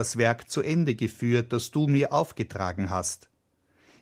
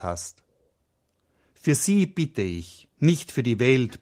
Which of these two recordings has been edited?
second; 1 cut; at 2.9 s

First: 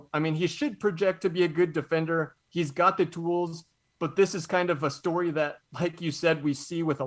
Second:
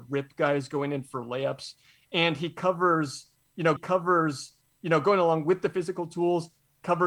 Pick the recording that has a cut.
second; 1 cut; at 3.8 s

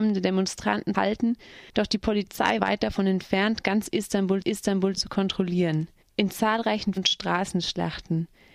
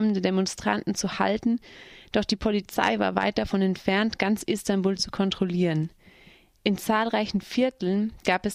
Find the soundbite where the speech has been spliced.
first; 6 cuts; at 0.9 s, 1.7 s, 2.6 s, 4.4 s, 6.0 s, 7.0 s

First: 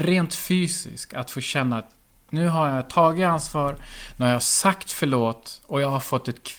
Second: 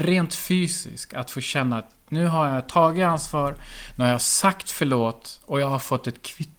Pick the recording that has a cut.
second; 1 cut; at 2.0 s

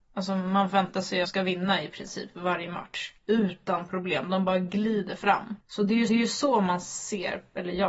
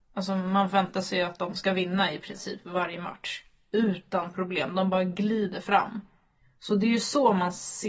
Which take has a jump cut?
first; 4 cuts; at 1.2 s, 3.2 s, 5.6 s, 6.1 s

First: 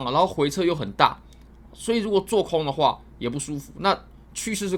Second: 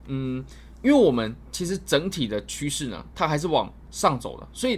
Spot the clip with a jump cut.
second; 1 cut; at 3.1 s

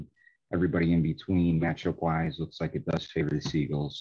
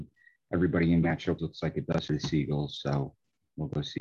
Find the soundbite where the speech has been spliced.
second; 3 cuts; at 1.0 s, 1.4 s, 2.1 s

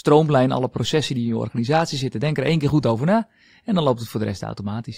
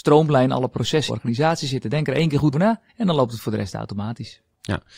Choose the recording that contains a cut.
second; 3 cuts; at 1.1 s, 2.5 s, 2.9 s

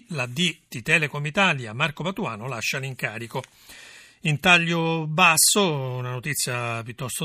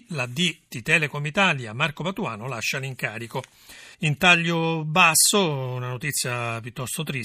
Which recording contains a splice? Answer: second; 1 cut; at 3.9 s

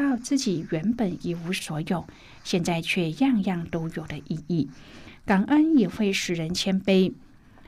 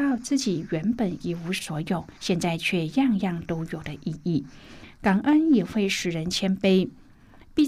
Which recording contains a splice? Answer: second; 1 cut; at 2.2 s

